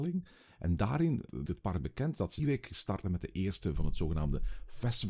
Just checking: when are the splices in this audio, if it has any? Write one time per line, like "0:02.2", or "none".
0:01.5
0:02.4
0:03.0
0:03.7

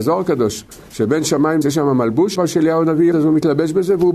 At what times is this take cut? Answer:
0:01.6
0:02.4
0:03.1

